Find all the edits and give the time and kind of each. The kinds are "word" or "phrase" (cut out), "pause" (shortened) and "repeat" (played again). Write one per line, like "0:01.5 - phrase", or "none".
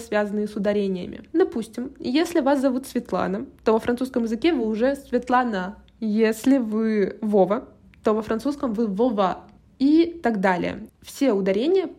none